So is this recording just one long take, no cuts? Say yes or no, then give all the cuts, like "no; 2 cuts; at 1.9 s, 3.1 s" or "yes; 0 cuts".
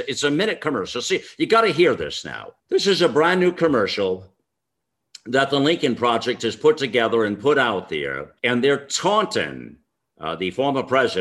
no; 2 cuts; at 2.6 s, 8.4 s